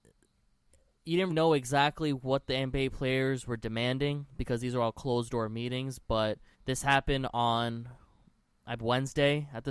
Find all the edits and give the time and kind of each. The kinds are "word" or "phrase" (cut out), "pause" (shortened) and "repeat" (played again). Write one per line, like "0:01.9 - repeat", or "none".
0:01.3 - word
0:06.5 - pause
0:08.8 - word